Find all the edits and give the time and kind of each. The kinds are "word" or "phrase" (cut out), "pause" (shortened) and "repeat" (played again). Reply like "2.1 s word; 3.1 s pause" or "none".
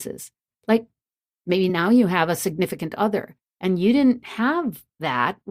none